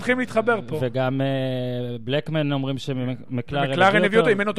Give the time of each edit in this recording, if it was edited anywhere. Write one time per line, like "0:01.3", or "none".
none